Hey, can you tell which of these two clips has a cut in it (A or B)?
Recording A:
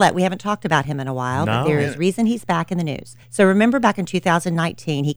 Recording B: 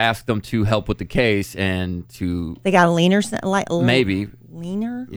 A